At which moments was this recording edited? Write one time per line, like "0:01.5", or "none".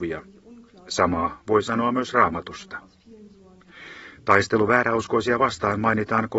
none